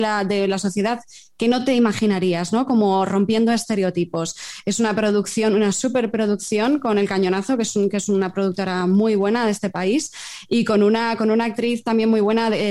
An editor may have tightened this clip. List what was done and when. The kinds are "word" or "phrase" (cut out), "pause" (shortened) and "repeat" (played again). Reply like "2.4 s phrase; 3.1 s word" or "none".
none